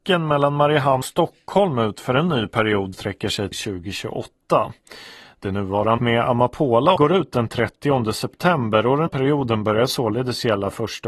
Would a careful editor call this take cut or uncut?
cut